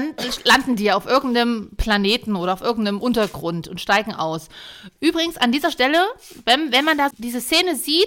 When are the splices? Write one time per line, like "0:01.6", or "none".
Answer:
0:07.1